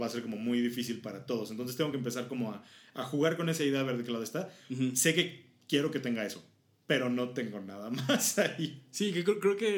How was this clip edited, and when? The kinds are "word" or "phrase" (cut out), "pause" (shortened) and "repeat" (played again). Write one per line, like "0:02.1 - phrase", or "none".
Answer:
none